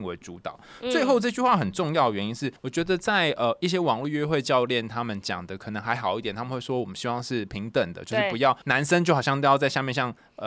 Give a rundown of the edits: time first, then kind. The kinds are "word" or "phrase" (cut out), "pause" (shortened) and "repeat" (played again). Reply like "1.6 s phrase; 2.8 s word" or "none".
2.6 s pause; 8.6 s pause